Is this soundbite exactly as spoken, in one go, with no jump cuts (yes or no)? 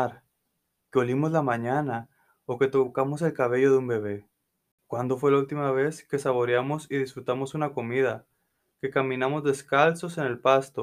yes